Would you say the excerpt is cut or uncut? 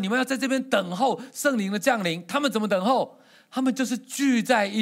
uncut